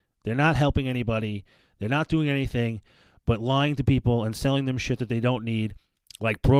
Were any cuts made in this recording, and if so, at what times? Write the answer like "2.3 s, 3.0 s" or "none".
none